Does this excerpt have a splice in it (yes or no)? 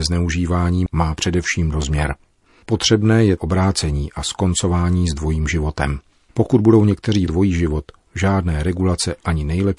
yes